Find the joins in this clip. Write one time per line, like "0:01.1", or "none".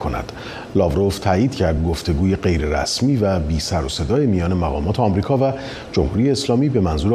none